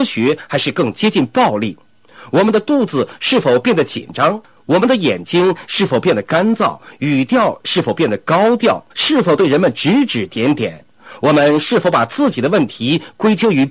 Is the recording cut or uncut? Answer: cut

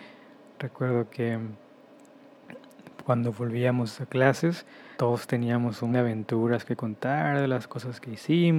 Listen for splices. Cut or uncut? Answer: cut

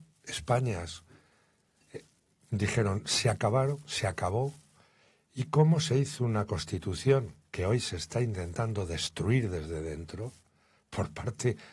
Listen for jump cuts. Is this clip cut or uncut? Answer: uncut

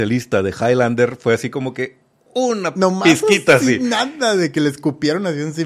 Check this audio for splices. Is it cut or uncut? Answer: uncut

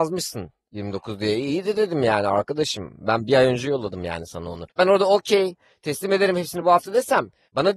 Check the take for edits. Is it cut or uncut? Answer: cut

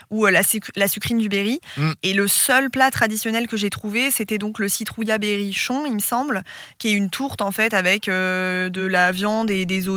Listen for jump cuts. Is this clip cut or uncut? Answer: uncut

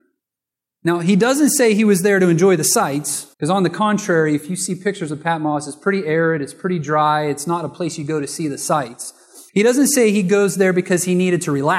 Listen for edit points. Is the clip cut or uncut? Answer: cut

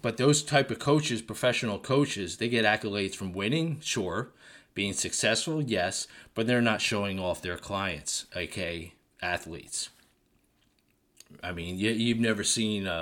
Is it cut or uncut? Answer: uncut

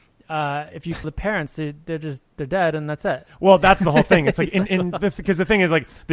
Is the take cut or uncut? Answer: cut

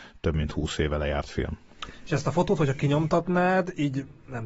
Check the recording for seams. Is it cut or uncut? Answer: uncut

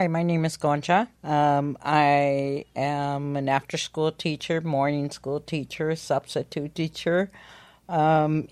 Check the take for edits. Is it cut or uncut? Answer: cut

